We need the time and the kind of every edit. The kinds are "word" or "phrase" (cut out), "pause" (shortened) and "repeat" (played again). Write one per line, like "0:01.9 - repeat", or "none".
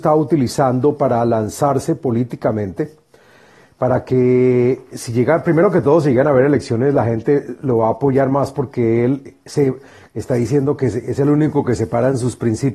none